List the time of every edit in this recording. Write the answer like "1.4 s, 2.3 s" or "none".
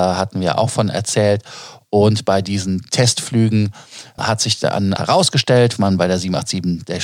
4.2 s, 5.0 s, 5.8 s